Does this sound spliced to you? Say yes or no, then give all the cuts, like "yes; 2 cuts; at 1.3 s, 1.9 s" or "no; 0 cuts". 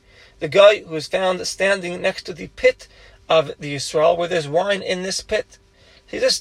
no; 0 cuts